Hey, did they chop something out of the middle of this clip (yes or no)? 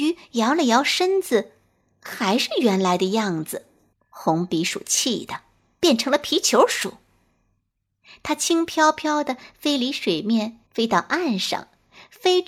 yes